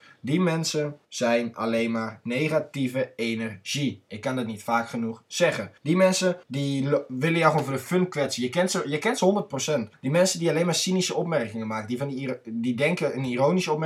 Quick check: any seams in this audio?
yes; 4 cuts; at 1.0 s, 5.8 s, 6.4 s, 9.9 s

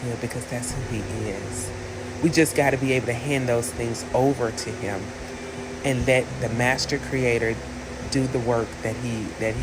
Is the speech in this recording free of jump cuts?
yes; 0 cuts

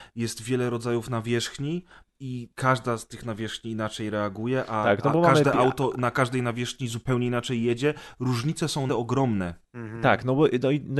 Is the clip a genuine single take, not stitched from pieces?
no; 1 cut; at 8.9 s

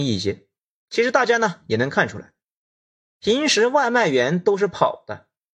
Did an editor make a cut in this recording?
no; 0 cuts

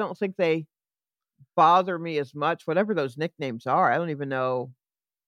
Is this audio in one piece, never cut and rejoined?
yes; 0 cuts

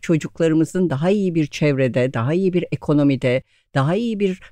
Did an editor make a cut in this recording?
no; 0 cuts

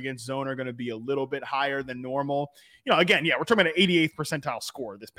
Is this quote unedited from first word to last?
yes; 0 cuts

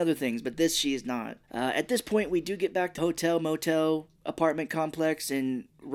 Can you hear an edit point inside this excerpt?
yes; 3 cuts; at 1.4 s, 3.0 s, 4.2 s

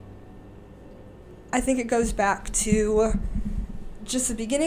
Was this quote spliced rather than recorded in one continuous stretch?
no; 0 cuts

